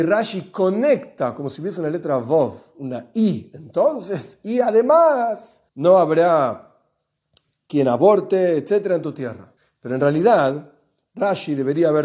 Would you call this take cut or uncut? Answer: cut